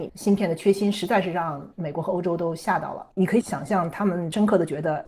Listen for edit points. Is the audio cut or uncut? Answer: cut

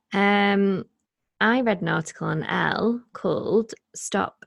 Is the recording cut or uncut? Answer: uncut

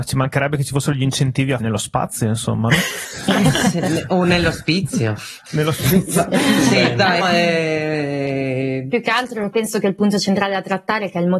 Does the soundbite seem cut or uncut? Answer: cut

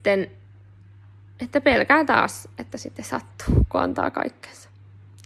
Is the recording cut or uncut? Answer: uncut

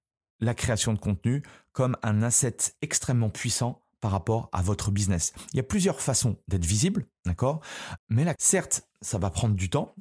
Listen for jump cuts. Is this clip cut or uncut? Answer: cut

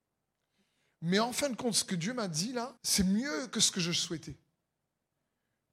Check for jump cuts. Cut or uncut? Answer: cut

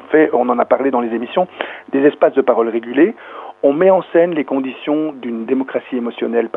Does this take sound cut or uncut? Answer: uncut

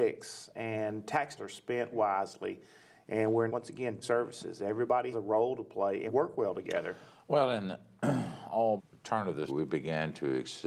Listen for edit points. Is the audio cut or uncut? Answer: cut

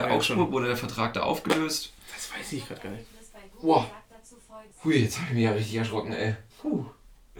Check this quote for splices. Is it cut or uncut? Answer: cut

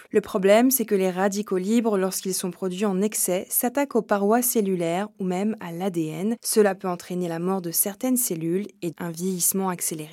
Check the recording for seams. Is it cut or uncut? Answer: cut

